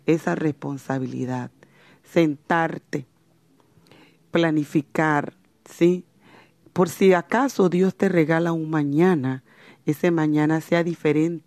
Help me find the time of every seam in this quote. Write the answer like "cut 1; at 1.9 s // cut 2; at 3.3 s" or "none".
cut 1; at 5.5 s